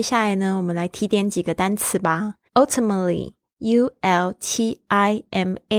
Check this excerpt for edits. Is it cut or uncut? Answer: cut